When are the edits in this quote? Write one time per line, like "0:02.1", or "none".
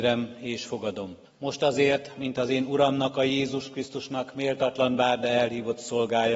0:01.2